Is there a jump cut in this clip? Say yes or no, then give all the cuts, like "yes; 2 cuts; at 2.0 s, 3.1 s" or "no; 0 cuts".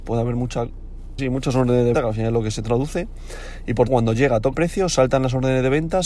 yes; 4 cuts; at 1.2 s, 1.9 s, 3.9 s, 4.5 s